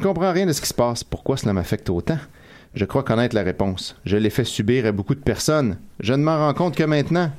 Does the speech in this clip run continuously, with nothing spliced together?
yes; 0 cuts

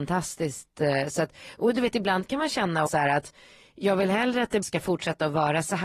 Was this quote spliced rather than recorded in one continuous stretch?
yes; 2 cuts; at 2.9 s, 4.6 s

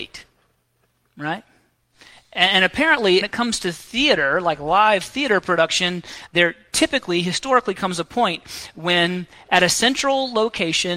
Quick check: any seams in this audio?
yes; 2 cuts; at 3.2 s, 6.3 s

